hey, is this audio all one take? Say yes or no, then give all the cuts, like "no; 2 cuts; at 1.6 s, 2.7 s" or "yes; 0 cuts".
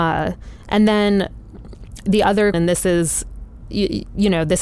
no; 1 cut; at 2.5 s